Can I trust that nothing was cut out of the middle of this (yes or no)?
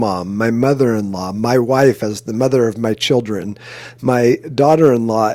yes